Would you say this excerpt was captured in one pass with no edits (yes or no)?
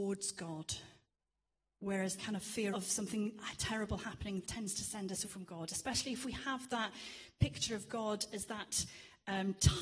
no